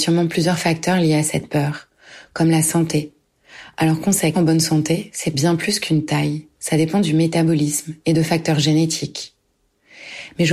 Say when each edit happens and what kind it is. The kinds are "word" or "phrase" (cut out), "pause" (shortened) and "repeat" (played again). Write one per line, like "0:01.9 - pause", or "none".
0:04.3 - word